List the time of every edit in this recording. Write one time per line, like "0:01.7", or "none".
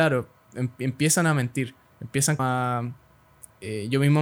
0:02.4